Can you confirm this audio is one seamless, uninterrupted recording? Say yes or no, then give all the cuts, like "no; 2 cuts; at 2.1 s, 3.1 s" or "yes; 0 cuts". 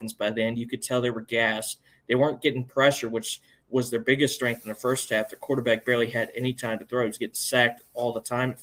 yes; 0 cuts